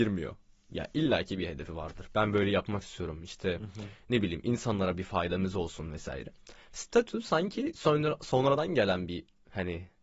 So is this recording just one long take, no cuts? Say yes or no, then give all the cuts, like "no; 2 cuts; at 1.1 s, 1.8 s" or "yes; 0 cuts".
yes; 0 cuts